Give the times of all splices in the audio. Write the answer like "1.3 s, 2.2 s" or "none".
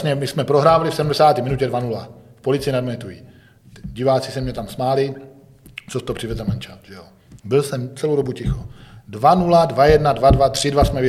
7.4 s